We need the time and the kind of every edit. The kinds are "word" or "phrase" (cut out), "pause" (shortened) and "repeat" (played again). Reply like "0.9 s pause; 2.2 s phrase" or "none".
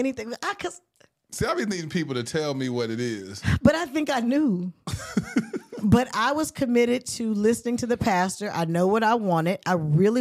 none